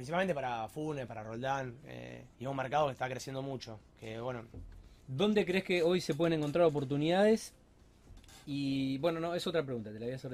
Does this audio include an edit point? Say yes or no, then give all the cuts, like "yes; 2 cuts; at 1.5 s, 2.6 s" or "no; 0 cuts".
yes; 3 cuts; at 2.3 s, 5.0 s, 8.4 s